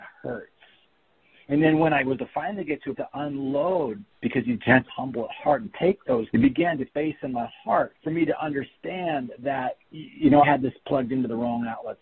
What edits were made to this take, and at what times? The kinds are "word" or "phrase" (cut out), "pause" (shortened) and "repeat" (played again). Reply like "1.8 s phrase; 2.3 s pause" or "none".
2.2 s word; 2.9 s word; 4.9 s word; 6.3 s word; 6.9 s phrase; 8.0 s pause; 9.9 s pause; 10.4 s word